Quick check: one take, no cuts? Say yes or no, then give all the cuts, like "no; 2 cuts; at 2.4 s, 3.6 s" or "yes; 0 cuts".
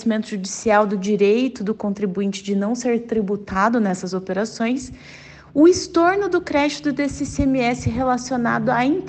yes; 0 cuts